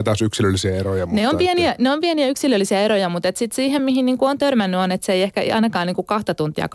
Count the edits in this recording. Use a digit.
0